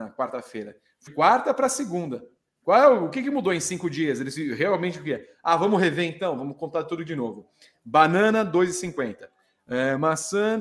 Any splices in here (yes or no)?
yes